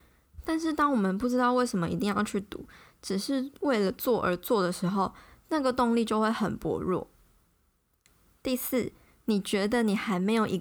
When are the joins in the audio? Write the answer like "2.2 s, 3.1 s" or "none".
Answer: none